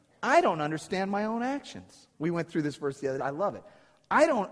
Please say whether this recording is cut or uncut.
cut